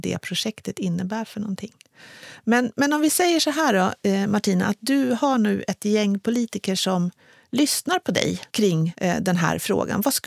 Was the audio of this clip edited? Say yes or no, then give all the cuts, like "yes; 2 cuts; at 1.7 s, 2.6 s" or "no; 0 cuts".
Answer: no; 0 cuts